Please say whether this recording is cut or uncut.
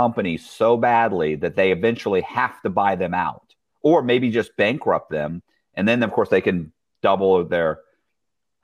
uncut